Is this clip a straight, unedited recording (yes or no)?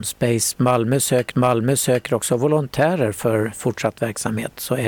no